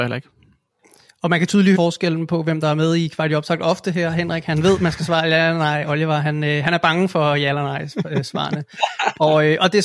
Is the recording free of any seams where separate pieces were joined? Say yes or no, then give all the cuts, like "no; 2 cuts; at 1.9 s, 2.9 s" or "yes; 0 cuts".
no; 1 cut; at 1.7 s